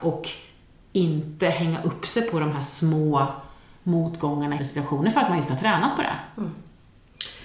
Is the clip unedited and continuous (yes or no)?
no